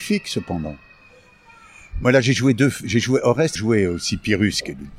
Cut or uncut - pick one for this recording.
cut